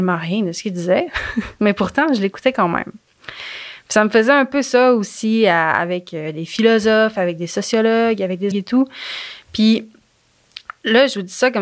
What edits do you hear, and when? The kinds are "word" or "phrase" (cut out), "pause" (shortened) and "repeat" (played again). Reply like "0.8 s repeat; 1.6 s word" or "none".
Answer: 8.5 s word